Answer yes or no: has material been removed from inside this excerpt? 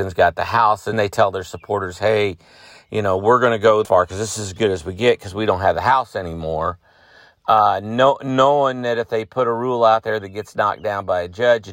yes